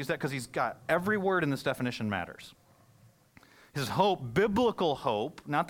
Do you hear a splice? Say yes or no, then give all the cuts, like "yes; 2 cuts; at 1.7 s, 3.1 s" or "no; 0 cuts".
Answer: no; 0 cuts